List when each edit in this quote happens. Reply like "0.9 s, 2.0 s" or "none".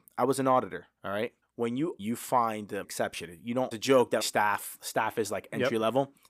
1.4 s, 2.0 s, 2.8 s, 3.7 s, 4.2 s